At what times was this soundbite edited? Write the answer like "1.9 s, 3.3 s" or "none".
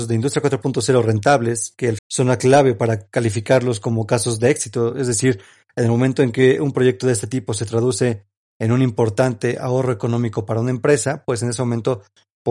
2.0 s

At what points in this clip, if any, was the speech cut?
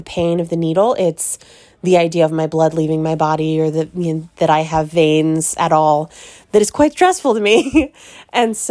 none

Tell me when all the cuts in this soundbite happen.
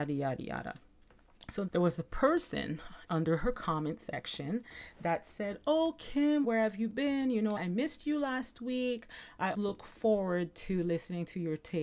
1.7 s, 3.1 s, 6.4 s, 7.6 s, 9.5 s

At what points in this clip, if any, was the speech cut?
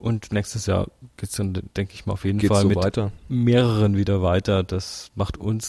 none

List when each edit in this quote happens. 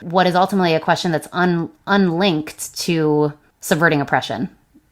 none

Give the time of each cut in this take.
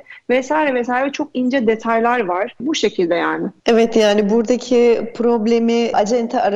none

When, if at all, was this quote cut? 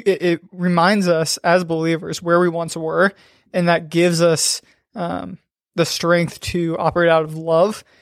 none

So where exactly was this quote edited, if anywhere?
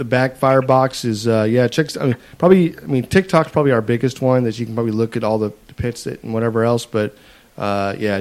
none

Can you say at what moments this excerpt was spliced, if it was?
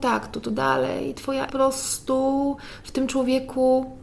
1.5 s

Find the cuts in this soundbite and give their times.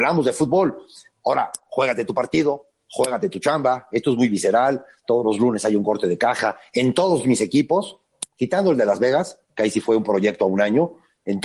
9.5 s

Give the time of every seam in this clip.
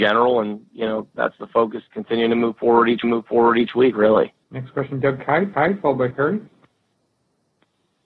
1.9 s, 3.0 s, 4.4 s, 5.5 s, 6.1 s

